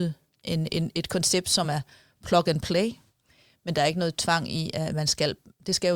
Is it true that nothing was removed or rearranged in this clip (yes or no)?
yes